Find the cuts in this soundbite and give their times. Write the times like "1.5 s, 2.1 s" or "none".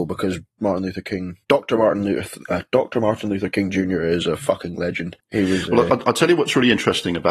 1.4 s